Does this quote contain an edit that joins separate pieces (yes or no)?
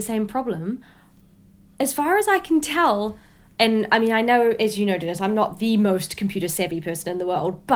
no